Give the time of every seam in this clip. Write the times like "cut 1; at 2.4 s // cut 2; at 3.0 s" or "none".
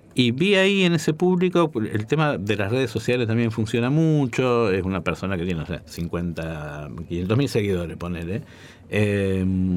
none